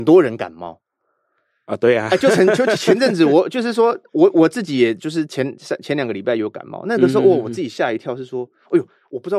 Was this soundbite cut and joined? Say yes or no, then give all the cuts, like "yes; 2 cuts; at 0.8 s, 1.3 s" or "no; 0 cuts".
no; 0 cuts